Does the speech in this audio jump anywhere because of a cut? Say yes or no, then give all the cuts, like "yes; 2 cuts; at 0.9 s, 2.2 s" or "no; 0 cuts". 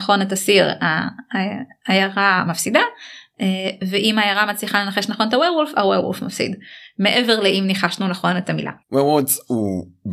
yes; 1 cut; at 8.8 s